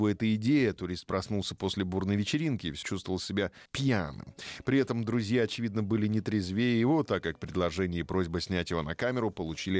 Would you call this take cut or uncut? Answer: cut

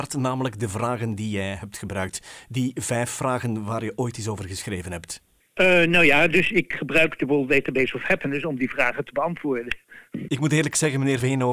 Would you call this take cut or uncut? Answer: uncut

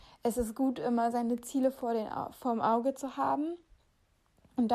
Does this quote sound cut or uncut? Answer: uncut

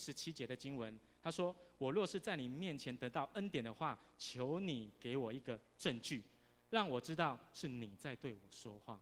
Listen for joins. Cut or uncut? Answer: uncut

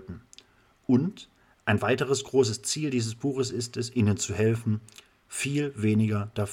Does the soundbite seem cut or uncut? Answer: uncut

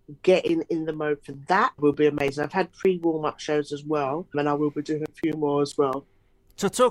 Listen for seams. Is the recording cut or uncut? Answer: uncut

